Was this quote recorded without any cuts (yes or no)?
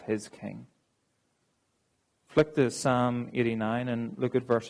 yes